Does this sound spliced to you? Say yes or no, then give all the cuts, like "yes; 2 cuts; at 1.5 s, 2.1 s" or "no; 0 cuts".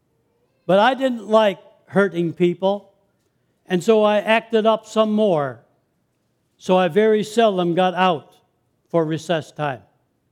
no; 0 cuts